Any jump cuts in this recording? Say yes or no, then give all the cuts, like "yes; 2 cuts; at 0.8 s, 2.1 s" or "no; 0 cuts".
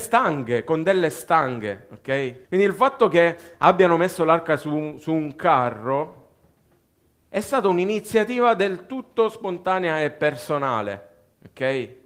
yes; 1 cut; at 2.4 s